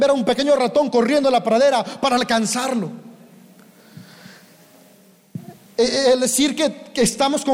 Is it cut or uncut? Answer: uncut